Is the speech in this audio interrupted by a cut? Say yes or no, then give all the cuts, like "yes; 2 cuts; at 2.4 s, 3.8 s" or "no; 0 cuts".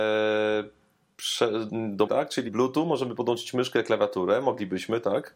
yes; 3 cuts; at 1.7 s, 2.1 s, 2.5 s